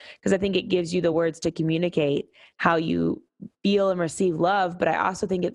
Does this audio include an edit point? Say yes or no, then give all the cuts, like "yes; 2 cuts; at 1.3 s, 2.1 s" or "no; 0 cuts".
no; 0 cuts